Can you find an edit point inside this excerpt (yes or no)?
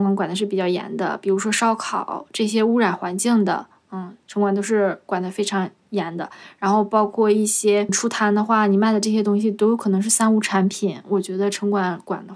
yes